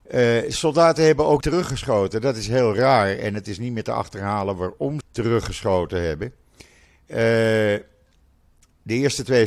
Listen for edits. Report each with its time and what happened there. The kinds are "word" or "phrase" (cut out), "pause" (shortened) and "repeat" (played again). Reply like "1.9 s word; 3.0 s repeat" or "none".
1.4 s word; 5.0 s phrase